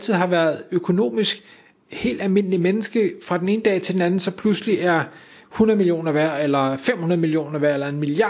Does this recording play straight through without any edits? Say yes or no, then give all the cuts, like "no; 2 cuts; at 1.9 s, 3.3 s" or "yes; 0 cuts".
yes; 0 cuts